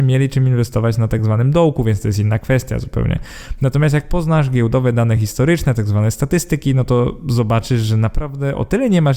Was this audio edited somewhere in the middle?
no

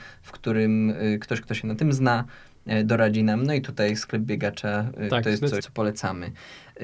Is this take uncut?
no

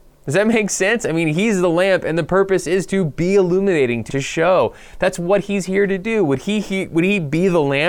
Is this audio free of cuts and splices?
no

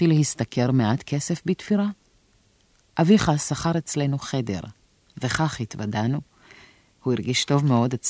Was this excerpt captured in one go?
yes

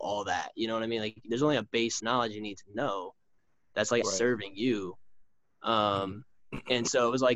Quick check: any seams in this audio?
yes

